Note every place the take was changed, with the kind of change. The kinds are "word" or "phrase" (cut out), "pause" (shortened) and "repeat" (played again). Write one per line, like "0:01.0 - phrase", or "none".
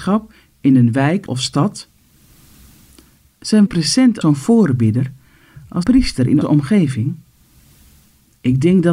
0:01.3 - word
0:03.7 - word
0:04.2 - word
0:05.8 - word
0:06.4 - word